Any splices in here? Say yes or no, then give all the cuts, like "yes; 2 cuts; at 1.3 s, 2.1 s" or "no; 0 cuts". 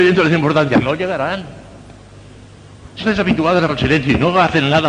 yes; 2 cuts; at 3.0 s, 3.7 s